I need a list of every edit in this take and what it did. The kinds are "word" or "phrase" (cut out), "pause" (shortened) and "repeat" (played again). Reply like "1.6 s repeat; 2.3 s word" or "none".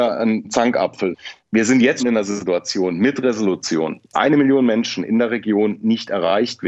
2.0 s word; 4.1 s word